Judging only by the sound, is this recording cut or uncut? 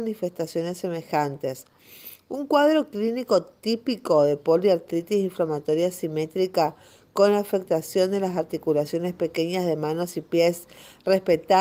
uncut